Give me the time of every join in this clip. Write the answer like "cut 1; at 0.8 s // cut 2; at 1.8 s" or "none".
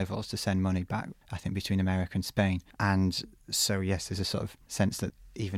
cut 1; at 2.7 s